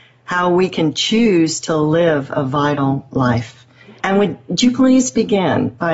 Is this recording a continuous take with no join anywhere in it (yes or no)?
no